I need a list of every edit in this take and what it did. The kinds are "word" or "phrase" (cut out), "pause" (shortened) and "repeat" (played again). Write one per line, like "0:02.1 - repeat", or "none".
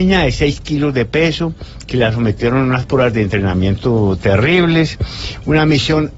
none